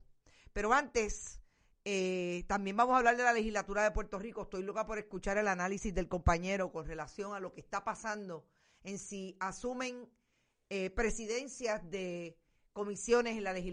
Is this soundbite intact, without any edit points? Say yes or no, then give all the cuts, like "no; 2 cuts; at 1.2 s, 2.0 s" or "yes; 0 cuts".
yes; 0 cuts